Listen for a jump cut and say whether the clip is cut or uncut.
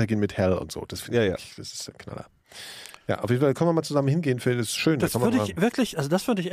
uncut